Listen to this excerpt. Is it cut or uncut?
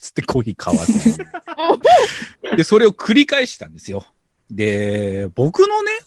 uncut